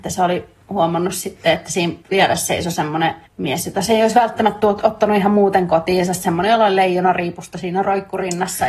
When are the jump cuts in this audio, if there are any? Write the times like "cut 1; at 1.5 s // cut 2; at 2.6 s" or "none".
cut 1; at 2.0 s // cut 2; at 3.3 s